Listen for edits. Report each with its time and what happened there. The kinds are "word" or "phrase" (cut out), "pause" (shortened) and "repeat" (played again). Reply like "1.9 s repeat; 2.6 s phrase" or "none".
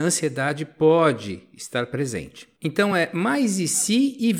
none